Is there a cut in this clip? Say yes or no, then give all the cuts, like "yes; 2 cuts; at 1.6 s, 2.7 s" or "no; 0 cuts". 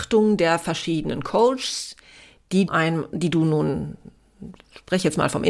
yes; 1 cut; at 2.7 s